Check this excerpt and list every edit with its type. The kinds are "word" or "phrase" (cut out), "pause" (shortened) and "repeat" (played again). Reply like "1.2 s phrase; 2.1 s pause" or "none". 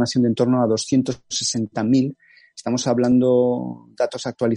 none